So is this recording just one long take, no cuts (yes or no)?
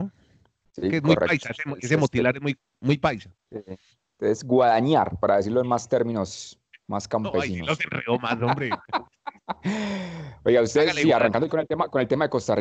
yes